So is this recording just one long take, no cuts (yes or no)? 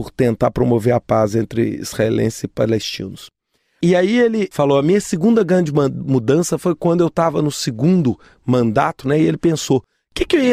yes